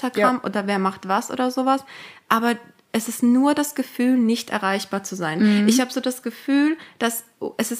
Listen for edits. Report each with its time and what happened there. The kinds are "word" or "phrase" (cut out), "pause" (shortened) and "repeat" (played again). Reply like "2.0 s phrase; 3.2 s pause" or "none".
none

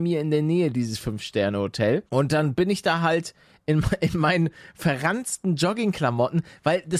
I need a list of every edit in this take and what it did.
2.1 s pause

